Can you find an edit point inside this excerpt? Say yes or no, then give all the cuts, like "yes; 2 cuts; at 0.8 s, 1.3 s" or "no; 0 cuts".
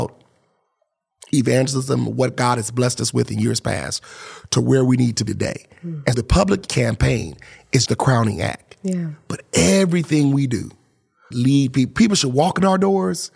yes; 5 cuts; at 5.3 s, 6.1 s, 6.7 s, 7.9 s, 11.3 s